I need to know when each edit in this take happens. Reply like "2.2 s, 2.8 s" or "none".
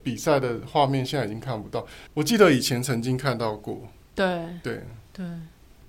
2.1 s, 4.0 s